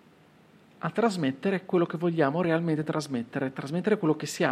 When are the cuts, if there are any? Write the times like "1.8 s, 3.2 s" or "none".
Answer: none